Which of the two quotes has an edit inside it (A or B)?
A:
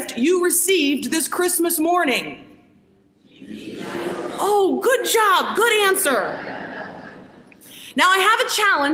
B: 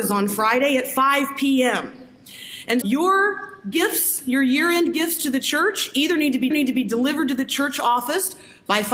B